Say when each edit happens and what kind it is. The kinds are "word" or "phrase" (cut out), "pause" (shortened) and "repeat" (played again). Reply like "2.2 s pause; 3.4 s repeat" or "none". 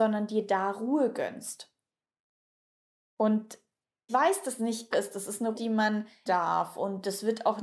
4.1 s word; 4.6 s word; 4.9 s word; 5.5 s word; 6.3 s word